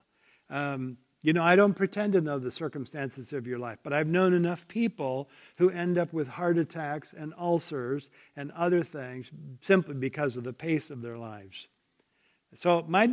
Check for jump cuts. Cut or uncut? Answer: uncut